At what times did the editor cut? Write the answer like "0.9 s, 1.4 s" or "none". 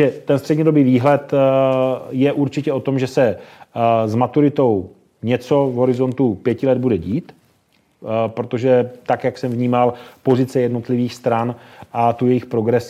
none